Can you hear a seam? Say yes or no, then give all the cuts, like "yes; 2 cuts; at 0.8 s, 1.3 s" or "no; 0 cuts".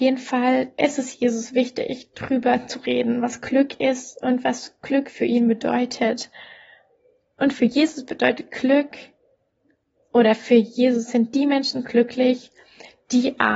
no; 0 cuts